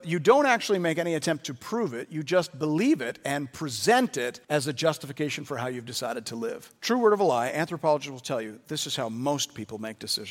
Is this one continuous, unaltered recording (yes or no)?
no